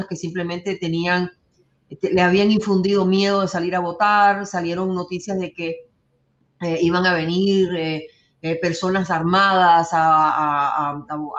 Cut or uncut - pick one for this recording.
uncut